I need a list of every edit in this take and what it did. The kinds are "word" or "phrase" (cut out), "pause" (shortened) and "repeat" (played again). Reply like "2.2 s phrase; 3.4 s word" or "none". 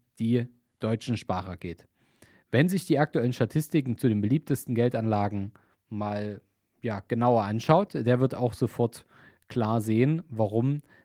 none